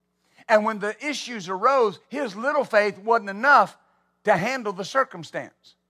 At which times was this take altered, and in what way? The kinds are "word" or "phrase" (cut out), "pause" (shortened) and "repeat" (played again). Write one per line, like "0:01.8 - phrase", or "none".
none